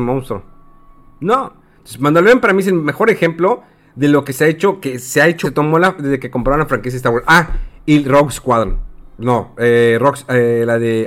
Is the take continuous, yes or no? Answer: no